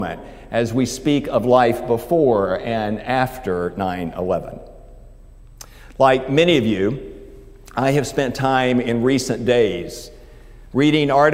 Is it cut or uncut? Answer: uncut